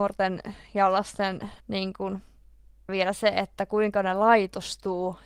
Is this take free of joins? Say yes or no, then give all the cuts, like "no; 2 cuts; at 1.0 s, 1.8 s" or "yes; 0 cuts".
no; 2 cuts; at 1.6 s, 2.9 s